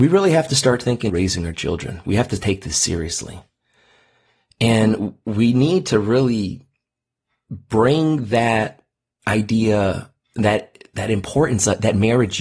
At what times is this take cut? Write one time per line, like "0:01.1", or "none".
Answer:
0:01.1